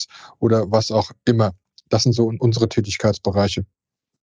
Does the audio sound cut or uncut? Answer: uncut